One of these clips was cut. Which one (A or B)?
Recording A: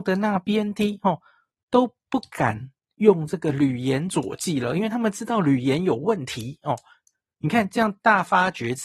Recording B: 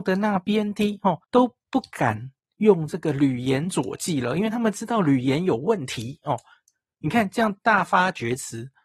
B